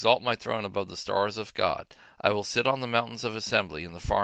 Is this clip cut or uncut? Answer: uncut